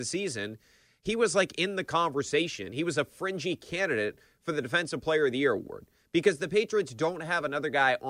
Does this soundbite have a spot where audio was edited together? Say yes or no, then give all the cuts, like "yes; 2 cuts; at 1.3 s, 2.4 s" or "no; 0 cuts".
no; 0 cuts